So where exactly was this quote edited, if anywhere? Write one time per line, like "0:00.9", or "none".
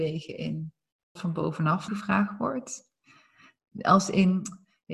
0:01.2
0:01.9